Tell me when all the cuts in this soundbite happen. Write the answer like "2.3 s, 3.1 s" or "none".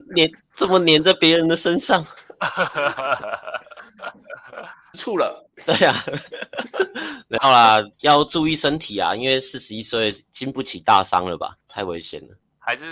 4.9 s, 5.5 s, 7.9 s